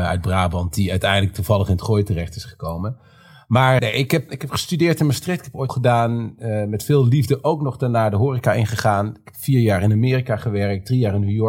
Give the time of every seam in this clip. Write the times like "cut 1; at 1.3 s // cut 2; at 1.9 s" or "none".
cut 1; at 3.8 s // cut 2; at 4.3 s // cut 3; at 5.7 s

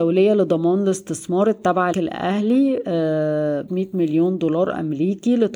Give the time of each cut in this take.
cut 1; at 1.9 s // cut 2; at 3.7 s

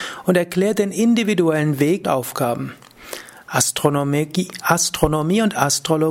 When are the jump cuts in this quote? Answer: cut 1; at 2.0 s

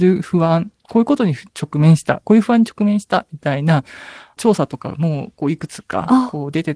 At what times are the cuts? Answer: cut 1; at 1.5 s

